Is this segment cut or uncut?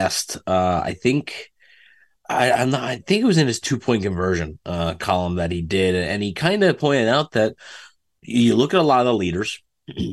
uncut